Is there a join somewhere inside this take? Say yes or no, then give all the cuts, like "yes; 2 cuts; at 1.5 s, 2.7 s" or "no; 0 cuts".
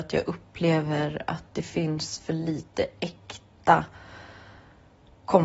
no; 0 cuts